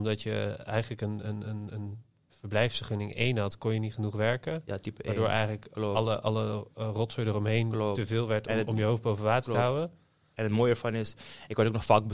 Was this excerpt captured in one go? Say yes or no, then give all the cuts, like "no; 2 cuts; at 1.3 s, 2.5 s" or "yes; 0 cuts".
yes; 0 cuts